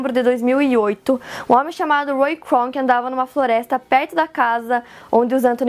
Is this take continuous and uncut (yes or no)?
yes